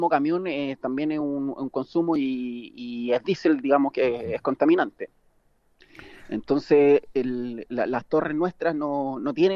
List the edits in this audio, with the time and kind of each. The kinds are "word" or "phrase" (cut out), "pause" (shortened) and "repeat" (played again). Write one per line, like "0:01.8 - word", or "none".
none